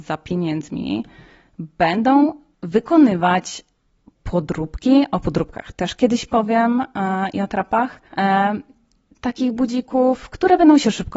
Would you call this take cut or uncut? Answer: cut